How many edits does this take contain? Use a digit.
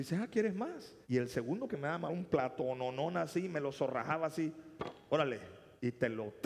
3